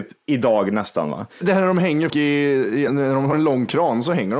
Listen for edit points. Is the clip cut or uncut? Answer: cut